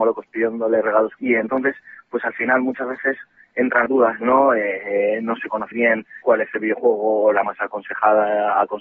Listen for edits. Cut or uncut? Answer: cut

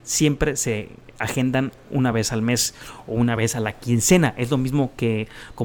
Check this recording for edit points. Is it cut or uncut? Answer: uncut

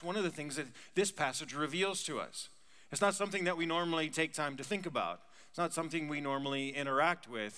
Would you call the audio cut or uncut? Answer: uncut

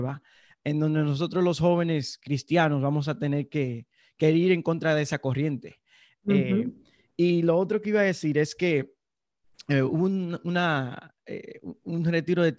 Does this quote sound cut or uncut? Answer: uncut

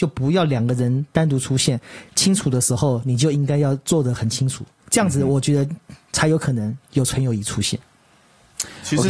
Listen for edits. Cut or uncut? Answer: cut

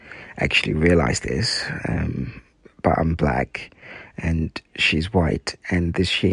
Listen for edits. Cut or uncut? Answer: uncut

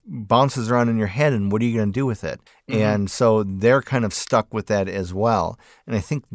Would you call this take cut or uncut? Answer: cut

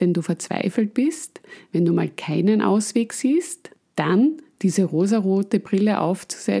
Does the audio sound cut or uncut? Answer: uncut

